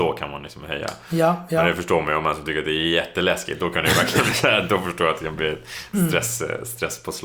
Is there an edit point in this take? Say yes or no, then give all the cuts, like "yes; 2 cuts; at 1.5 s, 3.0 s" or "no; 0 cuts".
no; 0 cuts